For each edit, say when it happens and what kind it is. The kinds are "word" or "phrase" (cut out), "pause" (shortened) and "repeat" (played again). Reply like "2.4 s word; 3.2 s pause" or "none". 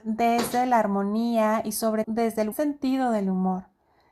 2.0 s word; 2.5 s word